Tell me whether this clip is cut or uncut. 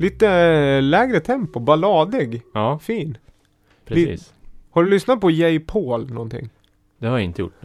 uncut